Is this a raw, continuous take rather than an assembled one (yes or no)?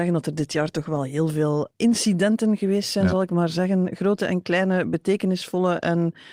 no